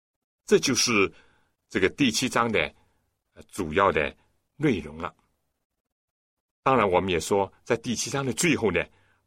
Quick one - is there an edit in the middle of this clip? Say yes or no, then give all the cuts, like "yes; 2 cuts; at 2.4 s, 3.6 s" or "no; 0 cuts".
no; 0 cuts